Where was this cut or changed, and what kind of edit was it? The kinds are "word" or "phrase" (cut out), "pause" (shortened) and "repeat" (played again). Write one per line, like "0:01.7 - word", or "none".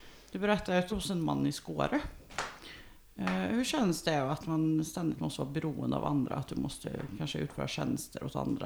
0:00.9 - phrase